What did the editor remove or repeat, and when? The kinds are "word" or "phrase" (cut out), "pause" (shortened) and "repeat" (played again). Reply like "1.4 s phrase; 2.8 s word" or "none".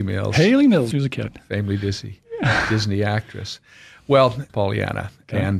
0.9 s word; 4.5 s phrase